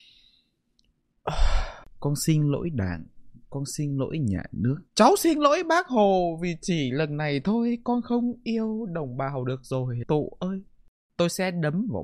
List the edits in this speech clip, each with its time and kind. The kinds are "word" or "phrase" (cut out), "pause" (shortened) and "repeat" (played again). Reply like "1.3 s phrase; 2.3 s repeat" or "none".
1.8 s pause; 4.9 s pause; 10.0 s word

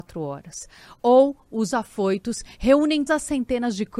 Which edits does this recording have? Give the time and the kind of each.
1.7 s word; 3.1 s word

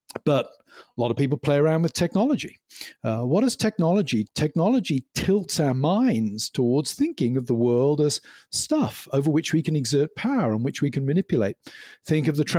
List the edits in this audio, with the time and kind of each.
none

